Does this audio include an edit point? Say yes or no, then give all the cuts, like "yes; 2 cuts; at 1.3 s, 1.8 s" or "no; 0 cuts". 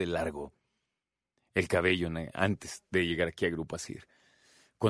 no; 0 cuts